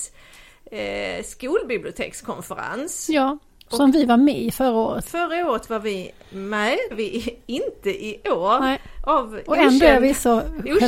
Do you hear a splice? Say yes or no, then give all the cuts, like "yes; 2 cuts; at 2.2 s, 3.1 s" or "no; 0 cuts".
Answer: yes; 1 cut; at 6.9 s